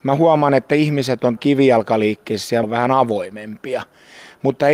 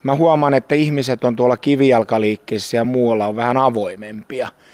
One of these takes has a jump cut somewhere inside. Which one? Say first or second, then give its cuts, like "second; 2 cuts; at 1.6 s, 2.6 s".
first; 2 cuts; at 1.4 s, 2.6 s